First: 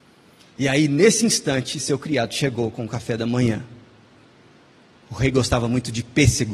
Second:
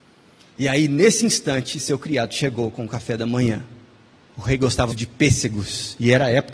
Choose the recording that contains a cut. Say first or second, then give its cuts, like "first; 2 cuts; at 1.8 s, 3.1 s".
second; 2 cuts; at 4.2 s, 4.9 s